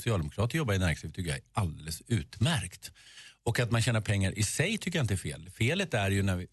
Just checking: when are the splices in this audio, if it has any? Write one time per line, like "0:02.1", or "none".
none